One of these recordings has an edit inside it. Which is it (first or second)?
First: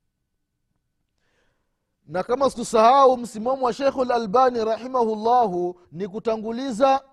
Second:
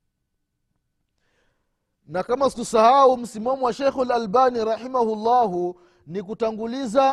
first